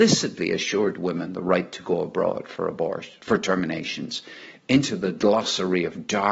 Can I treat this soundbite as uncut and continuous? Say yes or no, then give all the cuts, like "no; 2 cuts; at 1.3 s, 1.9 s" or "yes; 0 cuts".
yes; 0 cuts